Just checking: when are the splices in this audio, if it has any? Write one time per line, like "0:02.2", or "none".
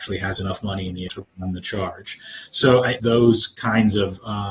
0:01.1
0:03.0

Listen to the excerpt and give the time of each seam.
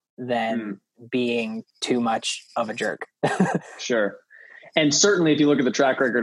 0:01.7
0:02.5

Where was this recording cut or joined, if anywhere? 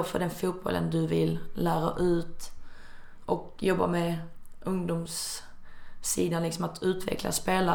none

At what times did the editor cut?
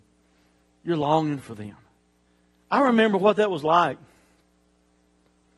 0:02.3

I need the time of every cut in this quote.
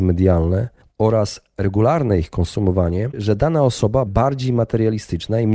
0:03.1
0:04.1

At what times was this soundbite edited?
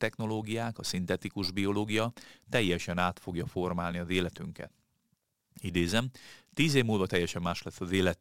none

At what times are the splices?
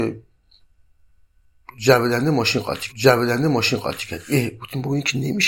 0:02.9

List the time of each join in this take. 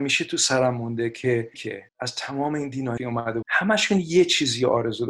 0:01.5
0:01.9
0:03.0
0:03.4

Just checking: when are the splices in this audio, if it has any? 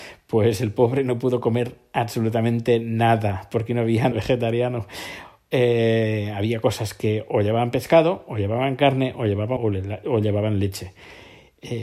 0:04.1
0:09.6

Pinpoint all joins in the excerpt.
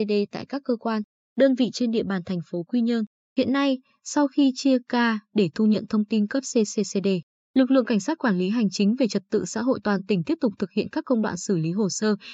none

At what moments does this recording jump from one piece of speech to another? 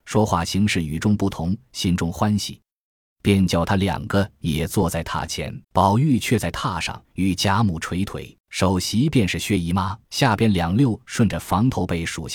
0:05.6
0:07.0
0:08.4
0:10.0

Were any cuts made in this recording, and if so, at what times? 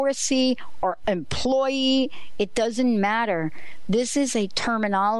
0:01.0

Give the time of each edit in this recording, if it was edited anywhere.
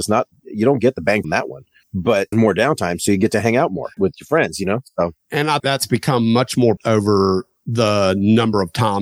0:01.2
0:02.3
0:04.0
0:05.6
0:06.8

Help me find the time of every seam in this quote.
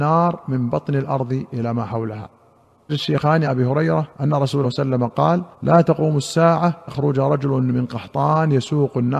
0:02.9
0:03.4
0:04.1
0:04.6
0:05.5
0:06.9

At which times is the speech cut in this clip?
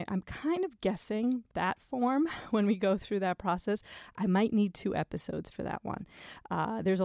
0:01.5

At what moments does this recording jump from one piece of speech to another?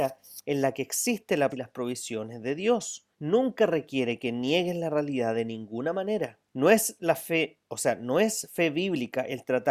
0:01.5
0:03.1
0:06.5

